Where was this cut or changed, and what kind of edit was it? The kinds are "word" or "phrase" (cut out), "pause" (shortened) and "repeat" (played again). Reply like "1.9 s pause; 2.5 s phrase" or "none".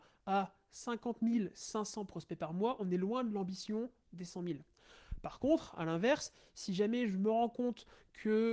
none

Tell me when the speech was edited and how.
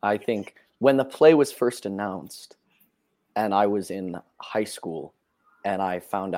none

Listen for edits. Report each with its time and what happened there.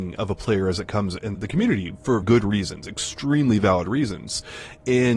1.3 s word; 2.2 s word

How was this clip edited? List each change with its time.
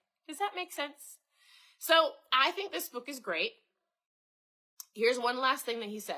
none

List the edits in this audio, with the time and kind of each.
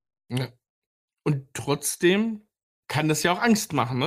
2.7 s pause

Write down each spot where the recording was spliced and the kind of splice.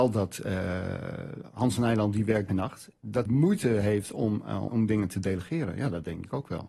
2.5 s word; 3.3 s word; 4.7 s word

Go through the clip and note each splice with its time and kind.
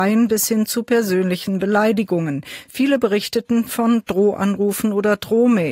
none

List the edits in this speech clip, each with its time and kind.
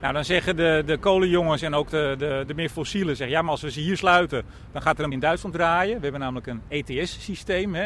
2.5 s word; 5.1 s word; 5.5 s word

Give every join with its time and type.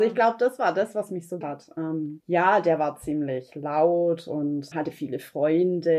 1.4 s word; 2.2 s pause; 4.7 s word

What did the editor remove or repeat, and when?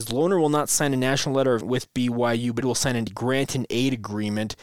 1.6 s word; 2.6 s word

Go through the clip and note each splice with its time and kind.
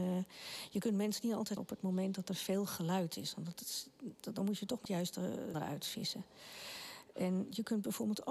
1.6 s word; 4.8 s word; 5.5 s word

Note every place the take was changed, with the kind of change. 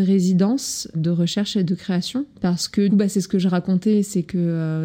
0.9 s word; 2.3 s pause; 2.9 s word

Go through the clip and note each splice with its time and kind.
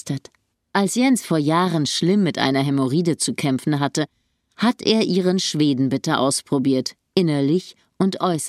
none

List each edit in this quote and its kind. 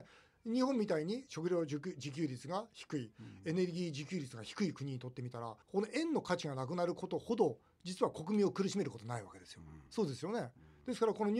5.6 s pause; 9.9 s pause

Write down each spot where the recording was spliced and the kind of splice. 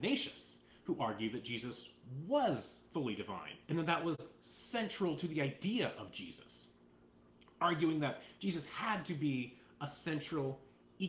3.6 s pause

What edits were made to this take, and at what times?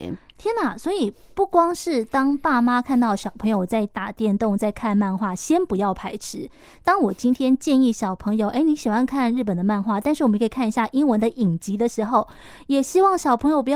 none

